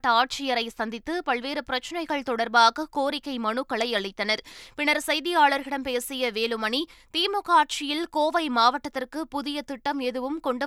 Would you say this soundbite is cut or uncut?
uncut